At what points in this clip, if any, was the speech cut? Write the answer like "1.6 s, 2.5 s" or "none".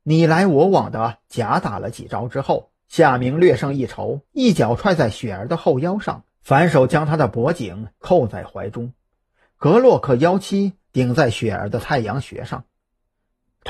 2.8 s, 4.3 s, 6.3 s